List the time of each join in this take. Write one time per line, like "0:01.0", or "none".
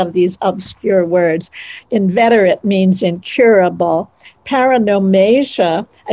none